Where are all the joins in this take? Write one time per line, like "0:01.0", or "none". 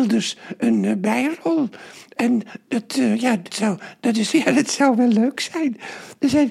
0:03.5
0:04.3